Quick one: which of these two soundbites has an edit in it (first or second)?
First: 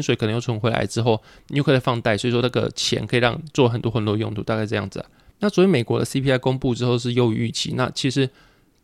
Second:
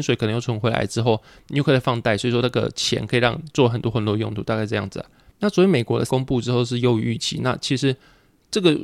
second